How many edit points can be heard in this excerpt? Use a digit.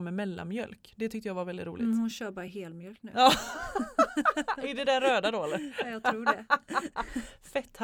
0